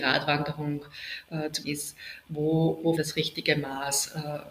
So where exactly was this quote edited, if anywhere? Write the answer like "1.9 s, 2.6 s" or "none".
1.6 s, 3.0 s